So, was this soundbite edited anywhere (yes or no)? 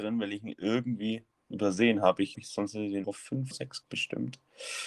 yes